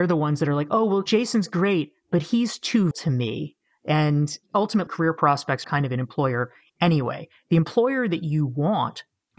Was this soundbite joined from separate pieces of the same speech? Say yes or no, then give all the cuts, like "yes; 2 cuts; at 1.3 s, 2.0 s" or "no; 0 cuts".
yes; 3 cuts; at 2.9 s, 4.9 s, 5.6 s